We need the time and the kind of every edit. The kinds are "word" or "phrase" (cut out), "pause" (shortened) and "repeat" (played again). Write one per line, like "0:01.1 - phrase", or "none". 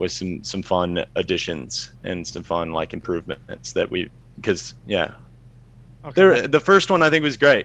none